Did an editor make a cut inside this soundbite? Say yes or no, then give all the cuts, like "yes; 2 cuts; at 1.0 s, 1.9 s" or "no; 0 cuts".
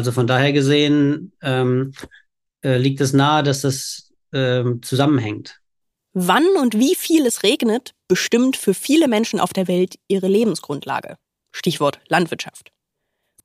no; 0 cuts